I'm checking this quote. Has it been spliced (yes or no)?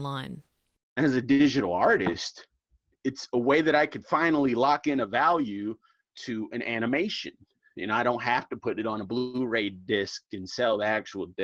no